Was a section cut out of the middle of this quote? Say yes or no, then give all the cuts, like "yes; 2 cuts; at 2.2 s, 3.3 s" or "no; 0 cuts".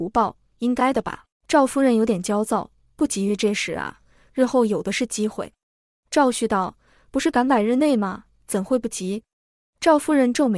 yes; 1 cut; at 1.3 s